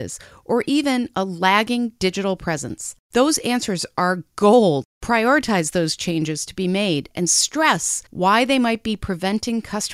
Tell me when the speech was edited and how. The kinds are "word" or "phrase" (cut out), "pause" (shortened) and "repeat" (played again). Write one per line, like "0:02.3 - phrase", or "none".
0:03.0 - pause
0:04.9 - pause
0:08.1 - pause